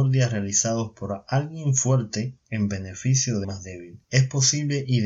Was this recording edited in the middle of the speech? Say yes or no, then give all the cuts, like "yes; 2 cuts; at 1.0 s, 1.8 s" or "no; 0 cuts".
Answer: yes; 3 cuts; at 2.4 s, 3.4 s, 4.0 s